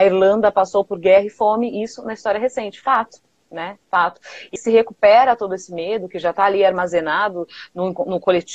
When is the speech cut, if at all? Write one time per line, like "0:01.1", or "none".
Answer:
0:04.6